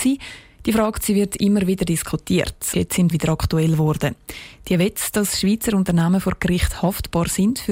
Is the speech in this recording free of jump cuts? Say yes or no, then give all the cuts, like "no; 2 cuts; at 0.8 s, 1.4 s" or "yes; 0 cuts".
no; 2 cuts; at 2.7 s, 3.1 s